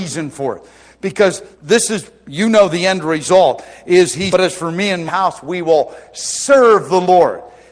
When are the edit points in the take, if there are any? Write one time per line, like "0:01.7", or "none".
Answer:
0:01.5
0:04.3
0:05.1

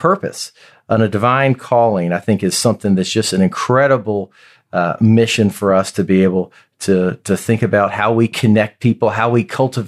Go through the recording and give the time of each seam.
none

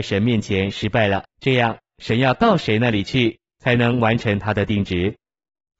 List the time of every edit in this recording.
0:01.3

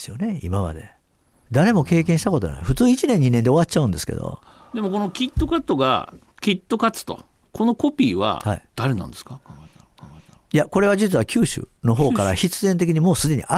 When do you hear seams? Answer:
0:10.0
0:11.8

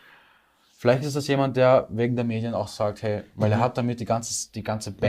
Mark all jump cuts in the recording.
none

